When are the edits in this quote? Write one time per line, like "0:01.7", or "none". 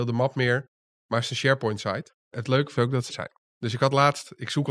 0:02.2
0:02.8
0:03.1

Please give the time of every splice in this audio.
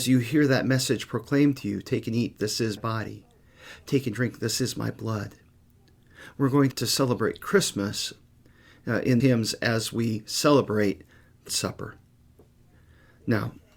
0:02.8
0:06.7
0:09.2
0:11.5

